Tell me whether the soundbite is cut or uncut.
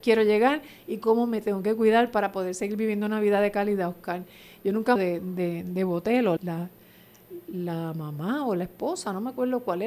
cut